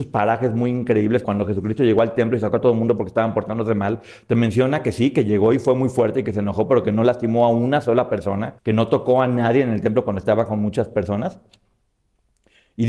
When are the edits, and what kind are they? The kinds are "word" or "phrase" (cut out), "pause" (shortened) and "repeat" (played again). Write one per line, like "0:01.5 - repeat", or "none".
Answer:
0:01.2 - word
0:08.6 - pause